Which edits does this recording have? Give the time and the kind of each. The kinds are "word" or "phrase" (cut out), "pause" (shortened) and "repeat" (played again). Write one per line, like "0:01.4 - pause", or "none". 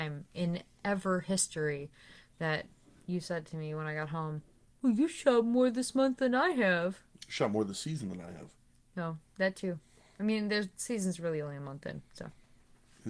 none

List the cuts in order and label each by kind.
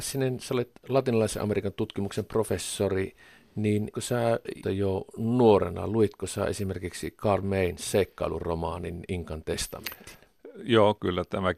0:03.9 - word
0:04.6 - word

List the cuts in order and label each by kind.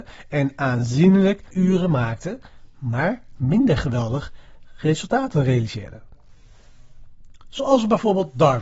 0:01.5 - word

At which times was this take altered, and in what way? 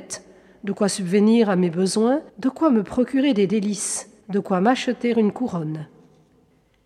0:02.3 - pause
0:04.2 - pause

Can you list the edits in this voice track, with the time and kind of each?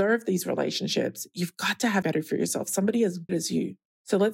0:02.0 - word
0:03.3 - word

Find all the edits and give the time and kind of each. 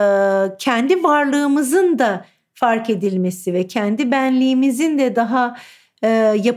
none

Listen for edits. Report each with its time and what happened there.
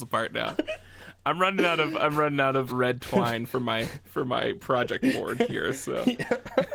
0:02.7 - word

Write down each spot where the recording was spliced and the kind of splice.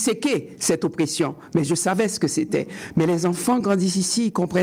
none

